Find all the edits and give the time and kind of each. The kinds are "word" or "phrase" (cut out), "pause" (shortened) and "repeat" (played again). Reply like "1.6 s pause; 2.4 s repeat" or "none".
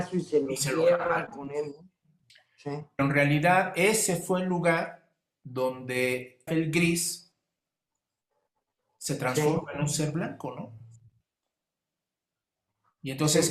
6.5 s word